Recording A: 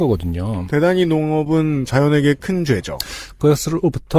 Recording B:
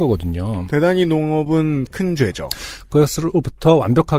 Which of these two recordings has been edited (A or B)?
B